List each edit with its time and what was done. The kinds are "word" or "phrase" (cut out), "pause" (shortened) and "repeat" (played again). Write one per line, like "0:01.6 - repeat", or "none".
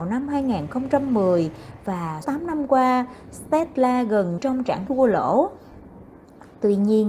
0:02.2 - word
0:04.4 - word
0:04.9 - word